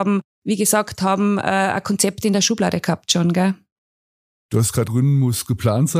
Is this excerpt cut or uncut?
cut